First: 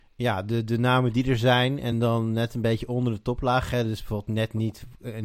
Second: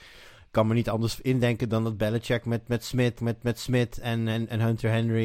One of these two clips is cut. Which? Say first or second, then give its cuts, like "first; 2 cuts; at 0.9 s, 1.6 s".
second; 1 cut; at 3.2 s